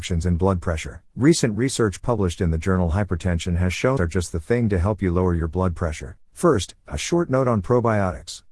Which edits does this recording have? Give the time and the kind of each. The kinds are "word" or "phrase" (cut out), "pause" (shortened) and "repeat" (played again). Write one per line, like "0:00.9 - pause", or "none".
0:01.1 - pause
0:04.0 - phrase
0:06.2 - pause